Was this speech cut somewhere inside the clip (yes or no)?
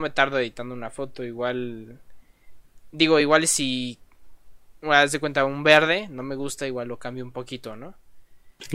no